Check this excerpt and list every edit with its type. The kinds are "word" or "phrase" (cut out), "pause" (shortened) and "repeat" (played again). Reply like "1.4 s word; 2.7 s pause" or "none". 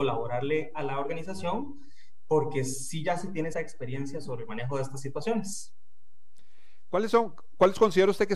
3.5 s word